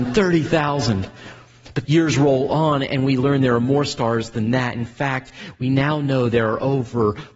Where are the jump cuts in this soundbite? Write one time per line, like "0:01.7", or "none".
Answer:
0:01.8